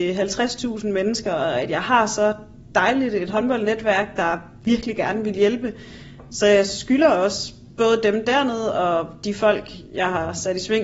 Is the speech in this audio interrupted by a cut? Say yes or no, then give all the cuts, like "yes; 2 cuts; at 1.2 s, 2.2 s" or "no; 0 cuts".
no; 0 cuts